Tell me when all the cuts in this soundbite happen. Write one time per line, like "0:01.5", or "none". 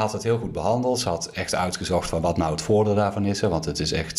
none